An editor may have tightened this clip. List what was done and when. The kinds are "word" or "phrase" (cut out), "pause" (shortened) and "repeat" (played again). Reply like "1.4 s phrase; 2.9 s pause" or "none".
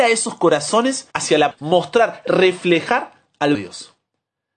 1.1 s pause; 1.5 s word; 3.5 s word